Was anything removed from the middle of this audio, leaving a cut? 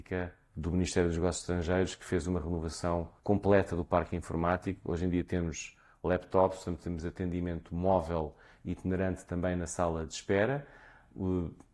yes; 1 cut; at 3.2 s

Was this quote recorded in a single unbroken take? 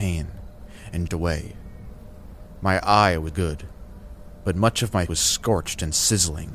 no; 3 cuts; at 1.1 s, 3.3 s, 5.1 s

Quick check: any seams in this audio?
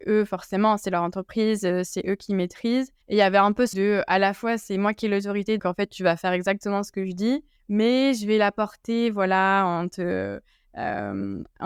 yes; 4 cuts; at 3.0 s, 3.7 s, 5.6 s, 7.6 s

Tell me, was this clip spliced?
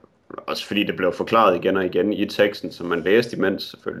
no; 0 cuts

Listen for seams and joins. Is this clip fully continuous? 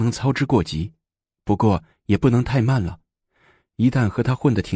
yes; 0 cuts

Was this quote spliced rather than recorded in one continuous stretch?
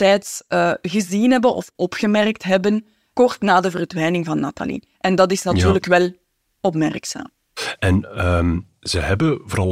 no; 0 cuts

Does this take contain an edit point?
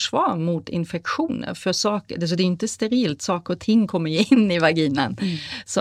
no; 0 cuts

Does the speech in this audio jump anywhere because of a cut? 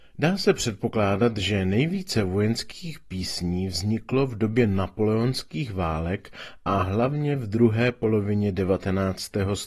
no; 0 cuts

